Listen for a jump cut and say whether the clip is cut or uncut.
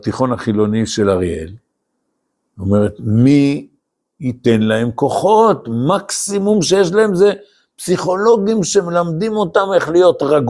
uncut